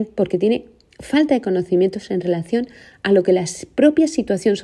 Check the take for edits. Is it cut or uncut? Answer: uncut